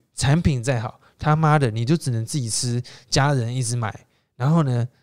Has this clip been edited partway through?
no; 0 cuts

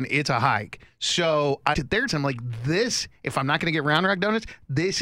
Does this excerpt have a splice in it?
yes; 2 cuts; at 1.7 s, 2.1 s

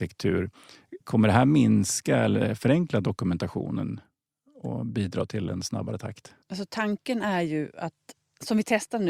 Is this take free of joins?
no; 2 cuts; at 1.0 s, 6.4 s

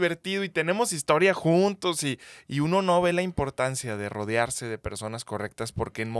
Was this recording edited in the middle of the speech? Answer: no; 0 cuts

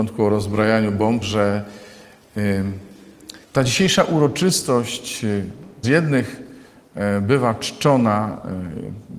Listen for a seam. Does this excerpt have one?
yes; 3 cuts; at 1.2 s, 3.4 s, 5.8 s

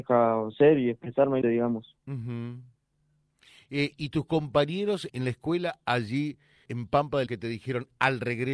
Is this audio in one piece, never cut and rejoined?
no; 5 cuts; at 1.4 s, 3.9 s, 5.1 s, 6.7 s, 7.3 s

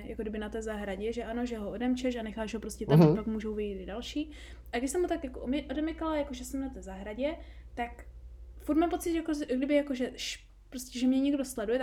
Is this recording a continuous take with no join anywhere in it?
yes; 0 cuts

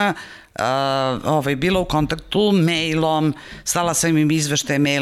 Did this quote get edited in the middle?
no; 0 cuts

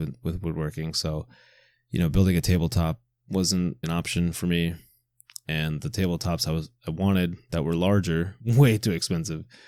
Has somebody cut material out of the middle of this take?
yes; 2 cuts; at 3.8 s, 8.4 s

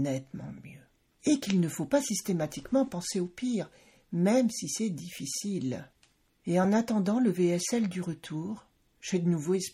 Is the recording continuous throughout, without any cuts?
yes; 0 cuts

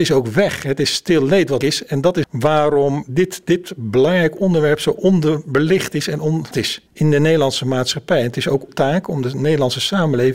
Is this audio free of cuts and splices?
no; 6 cuts; at 1.6 s, 2.2 s, 3.0 s, 6.5 s, 6.9 s, 8.7 s

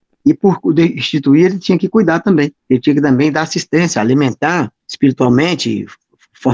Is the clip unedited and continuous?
no; 2 cuts; at 2.6 s, 4.8 s

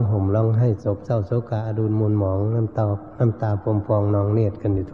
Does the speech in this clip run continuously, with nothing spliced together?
yes; 0 cuts

